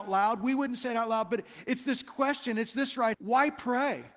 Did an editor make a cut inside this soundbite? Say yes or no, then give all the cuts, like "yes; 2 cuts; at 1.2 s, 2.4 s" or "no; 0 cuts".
yes; 1 cut; at 3.1 s